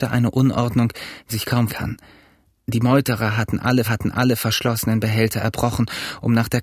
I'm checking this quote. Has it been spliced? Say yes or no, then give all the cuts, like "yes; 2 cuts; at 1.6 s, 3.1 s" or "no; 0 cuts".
yes; 3 cuts; at 1.3 s, 1.7 s, 3.8 s